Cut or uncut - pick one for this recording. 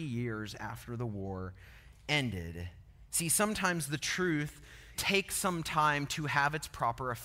cut